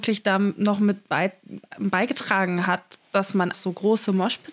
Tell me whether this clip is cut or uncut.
cut